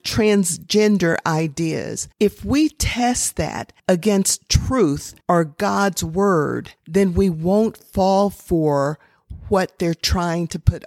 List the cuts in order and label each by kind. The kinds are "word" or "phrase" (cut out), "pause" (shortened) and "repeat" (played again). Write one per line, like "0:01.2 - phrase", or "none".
0:02.1 - pause
0:03.8 - pause
0:05.2 - pause
0:06.8 - pause

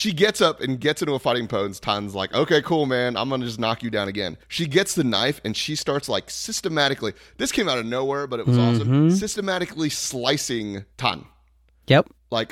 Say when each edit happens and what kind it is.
0:04.4 - pause
0:10.9 - pause

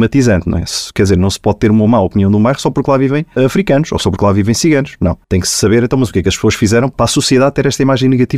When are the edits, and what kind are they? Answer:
0:03.4 - word
0:05.2 - pause

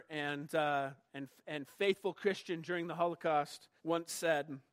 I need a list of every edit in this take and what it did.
0:03.8 - pause

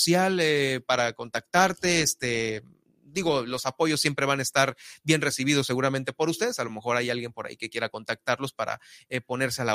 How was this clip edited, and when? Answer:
none

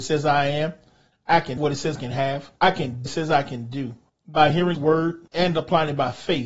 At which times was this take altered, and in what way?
0:01.6 - word
0:02.0 - word
0:02.6 - pause
0:03.1 - phrase
0:04.1 - pause
0:04.7 - word
0:05.3 - pause

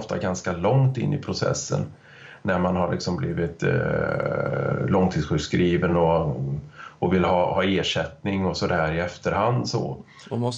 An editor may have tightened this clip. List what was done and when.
none

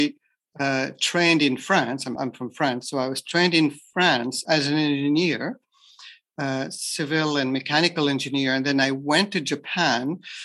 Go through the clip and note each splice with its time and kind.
0:02.2 - word
0:04.5 - word

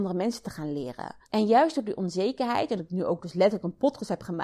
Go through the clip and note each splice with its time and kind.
0:01.2 - pause
0:02.8 - word

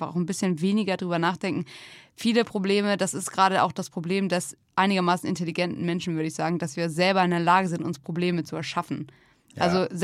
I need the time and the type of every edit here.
none

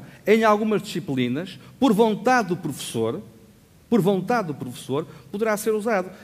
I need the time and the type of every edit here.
none

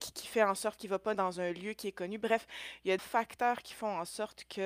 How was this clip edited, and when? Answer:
0:01.1 - word
0:03.0 - word

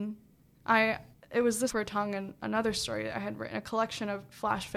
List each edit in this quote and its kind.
0:01.7 - phrase

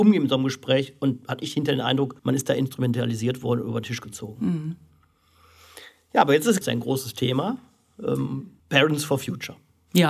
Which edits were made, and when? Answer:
0:02.2 - pause
0:06.6 - word
0:08.6 - pause

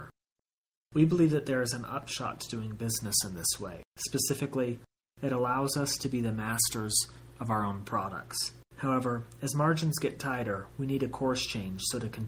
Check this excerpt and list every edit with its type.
0:03.9 - pause
0:08.7 - pause

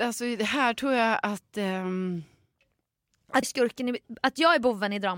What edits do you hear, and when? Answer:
0:03.4 - word

